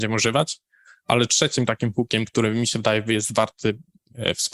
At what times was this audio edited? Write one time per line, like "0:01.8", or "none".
none